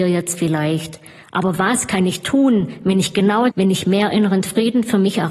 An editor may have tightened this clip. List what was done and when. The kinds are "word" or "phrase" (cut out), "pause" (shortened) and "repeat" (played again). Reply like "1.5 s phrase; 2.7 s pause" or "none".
3.5 s word